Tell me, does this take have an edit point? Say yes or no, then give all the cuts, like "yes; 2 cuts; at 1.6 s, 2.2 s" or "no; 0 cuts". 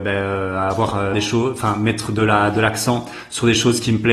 yes; 1 cut; at 1.1 s